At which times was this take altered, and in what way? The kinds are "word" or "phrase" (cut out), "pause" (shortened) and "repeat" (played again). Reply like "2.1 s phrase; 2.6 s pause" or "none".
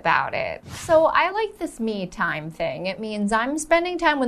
none